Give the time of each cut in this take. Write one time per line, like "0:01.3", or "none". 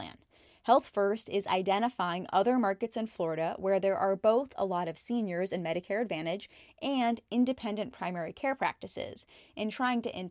none